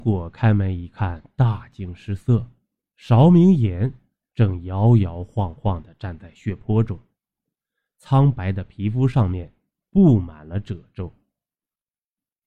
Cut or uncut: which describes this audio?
uncut